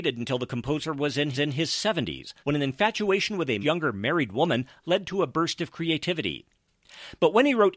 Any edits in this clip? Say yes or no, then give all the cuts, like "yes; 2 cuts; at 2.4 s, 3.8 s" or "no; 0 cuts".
yes; 3 cuts; at 1.3 s, 2.4 s, 3.6 s